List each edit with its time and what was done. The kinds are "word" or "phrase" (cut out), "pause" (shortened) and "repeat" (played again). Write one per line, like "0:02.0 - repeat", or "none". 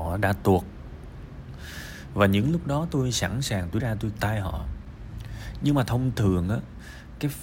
0:03.8 - word
0:04.2 - word

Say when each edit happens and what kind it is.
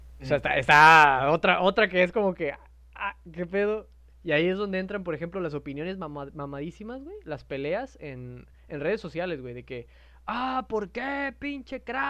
none

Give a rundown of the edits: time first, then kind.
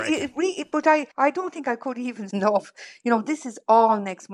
0:01.1 - pause
0:02.3 - word

